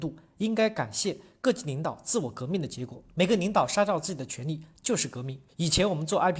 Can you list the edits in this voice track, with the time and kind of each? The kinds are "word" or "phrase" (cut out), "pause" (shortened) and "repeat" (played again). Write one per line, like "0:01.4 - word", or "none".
0:03.1 - pause
0:05.5 - pause